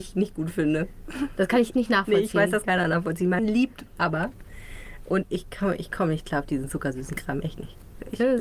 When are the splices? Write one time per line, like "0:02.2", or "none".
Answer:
0:01.7
0:02.6
0:03.4
0:05.2